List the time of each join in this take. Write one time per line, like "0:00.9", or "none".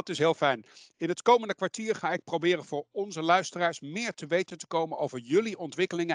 none

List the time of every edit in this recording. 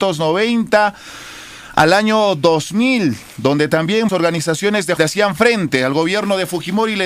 0:04.1
0:05.0

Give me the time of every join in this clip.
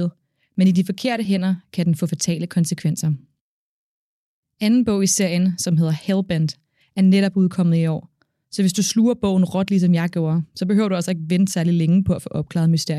none

